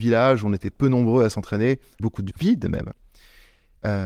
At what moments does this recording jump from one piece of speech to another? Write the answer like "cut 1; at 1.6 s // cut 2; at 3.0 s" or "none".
cut 1; at 2.0 s // cut 2; at 2.4 s